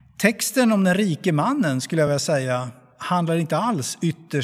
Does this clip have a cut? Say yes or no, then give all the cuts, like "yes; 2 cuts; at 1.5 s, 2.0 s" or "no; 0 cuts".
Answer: no; 0 cuts